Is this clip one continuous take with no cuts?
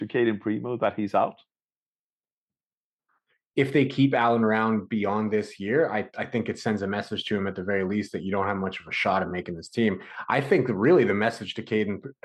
yes; 0 cuts

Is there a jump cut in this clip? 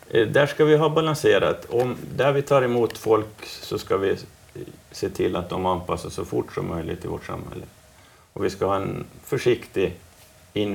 no; 0 cuts

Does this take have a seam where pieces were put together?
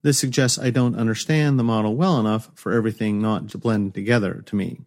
yes; 1 cut; at 3.5 s

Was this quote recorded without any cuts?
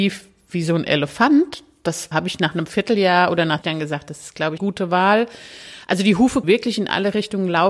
no; 4 cuts; at 2.1 s, 3.6 s, 4.6 s, 6.4 s

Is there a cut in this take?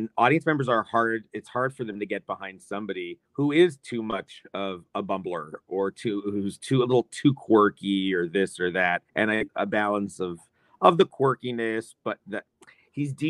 yes; 3 cuts; at 3.3 s, 9.1 s, 9.5 s

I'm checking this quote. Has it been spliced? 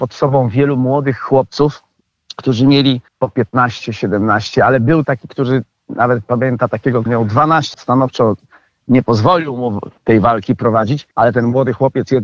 yes; 6 cuts; at 3.1 s, 5.0 s, 7.1 s, 7.7 s, 10.0 s, 11.1 s

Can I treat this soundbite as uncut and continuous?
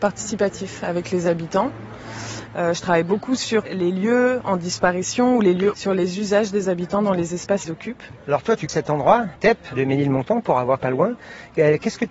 no; 6 cuts; at 3.6 s, 5.7 s, 7.6 s, 8.7 s, 9.4 s, 10.8 s

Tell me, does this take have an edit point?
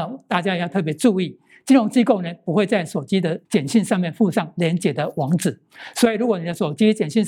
yes; 1 cut; at 3.4 s

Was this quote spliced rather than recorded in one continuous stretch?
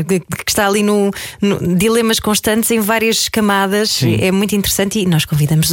no; 0 cuts

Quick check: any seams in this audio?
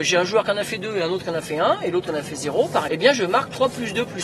yes; 1 cut; at 2.9 s

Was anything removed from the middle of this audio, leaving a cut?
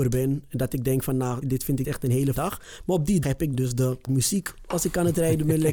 yes; 6 cuts; at 1.4 s, 1.8 s, 2.3 s, 3.2 s, 3.5 s, 4.1 s

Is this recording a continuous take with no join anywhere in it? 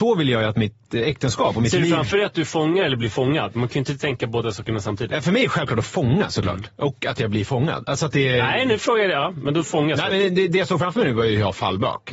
no; 1 cut; at 10.1 s

